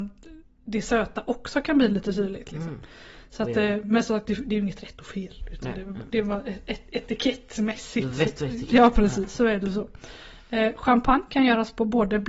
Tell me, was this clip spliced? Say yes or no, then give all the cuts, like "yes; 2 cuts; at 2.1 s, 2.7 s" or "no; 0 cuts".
no; 0 cuts